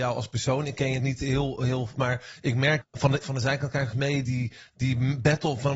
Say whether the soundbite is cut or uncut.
cut